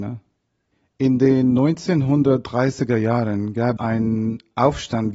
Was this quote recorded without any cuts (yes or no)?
no